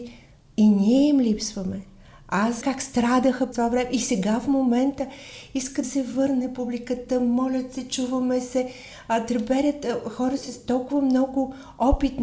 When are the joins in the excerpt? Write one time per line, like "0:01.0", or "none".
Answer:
0:02.6
0:03.5
0:05.8